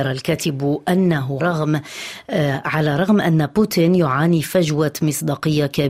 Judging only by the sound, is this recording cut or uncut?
cut